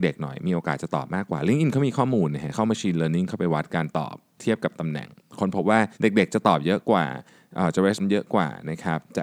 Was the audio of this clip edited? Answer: yes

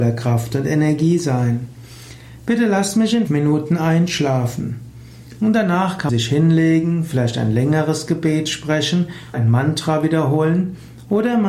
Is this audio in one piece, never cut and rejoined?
no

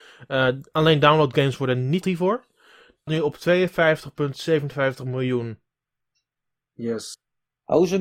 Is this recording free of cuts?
no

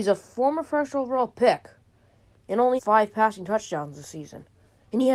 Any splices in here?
yes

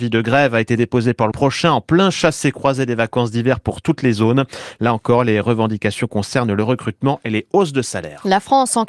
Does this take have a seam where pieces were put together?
yes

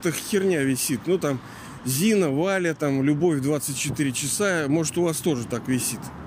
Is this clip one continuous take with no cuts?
yes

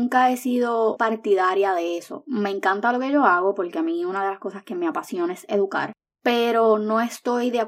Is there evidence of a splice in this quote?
yes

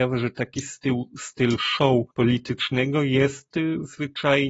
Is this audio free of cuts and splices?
no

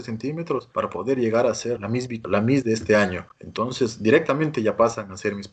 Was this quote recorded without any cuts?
no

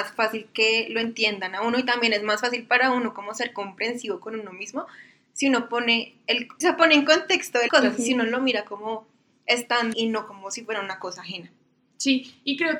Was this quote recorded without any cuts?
no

